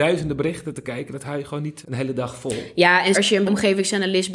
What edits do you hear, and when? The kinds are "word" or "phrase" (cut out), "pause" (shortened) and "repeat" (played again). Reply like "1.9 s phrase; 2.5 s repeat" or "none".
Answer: 1.8 s word; 3.1 s word; 3.5 s word